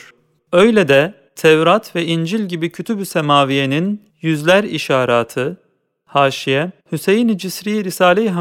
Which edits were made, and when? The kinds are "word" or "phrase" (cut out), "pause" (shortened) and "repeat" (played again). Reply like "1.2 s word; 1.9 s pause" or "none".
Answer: 1.3 s pause; 4.1 s pause; 6.8 s pause